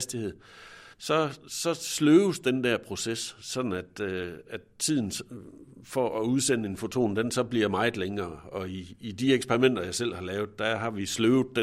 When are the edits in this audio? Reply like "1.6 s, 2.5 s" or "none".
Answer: 0.9 s